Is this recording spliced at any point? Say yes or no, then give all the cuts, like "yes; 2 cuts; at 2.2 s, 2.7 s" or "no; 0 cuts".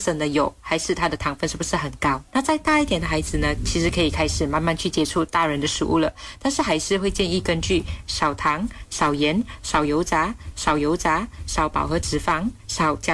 yes; 2 cuts; at 2.3 s, 10.5 s